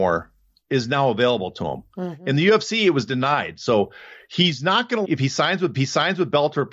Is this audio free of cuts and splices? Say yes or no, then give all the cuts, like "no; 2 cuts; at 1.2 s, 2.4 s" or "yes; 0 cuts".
no; 2 cuts; at 5.0 s, 5.7 s